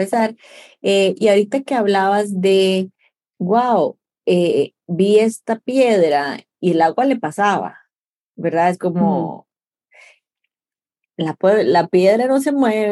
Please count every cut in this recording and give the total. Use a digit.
0